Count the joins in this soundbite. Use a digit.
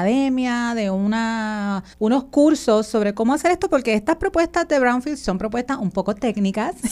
1